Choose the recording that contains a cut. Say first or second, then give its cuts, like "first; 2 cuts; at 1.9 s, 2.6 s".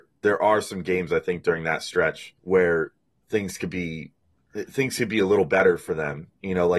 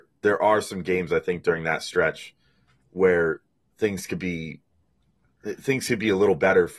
first; 2 cuts; at 2.4 s, 4.4 s